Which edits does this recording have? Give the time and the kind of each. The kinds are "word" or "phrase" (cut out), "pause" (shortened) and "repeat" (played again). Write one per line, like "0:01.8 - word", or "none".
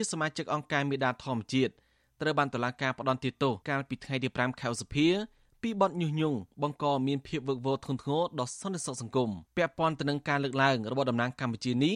0:03.6 - pause
0:09.5 - pause